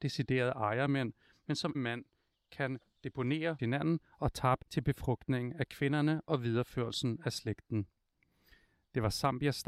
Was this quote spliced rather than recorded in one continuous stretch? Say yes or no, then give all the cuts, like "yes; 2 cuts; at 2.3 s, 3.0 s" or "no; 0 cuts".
yes; 3 cuts; at 1.7 s, 3.6 s, 4.6 s